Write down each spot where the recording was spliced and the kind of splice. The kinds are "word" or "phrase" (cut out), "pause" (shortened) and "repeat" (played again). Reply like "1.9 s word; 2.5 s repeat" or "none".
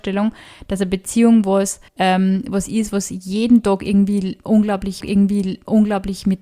1.9 s pause; 5.0 s repeat